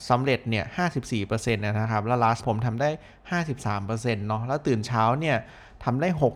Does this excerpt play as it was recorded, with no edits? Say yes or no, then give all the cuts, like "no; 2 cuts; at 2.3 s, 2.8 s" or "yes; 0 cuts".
no; 1 cut; at 2.4 s